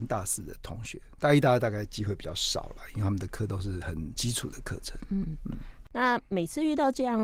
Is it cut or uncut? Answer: uncut